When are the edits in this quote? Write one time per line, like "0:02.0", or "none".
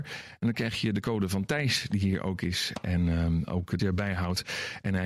0:03.8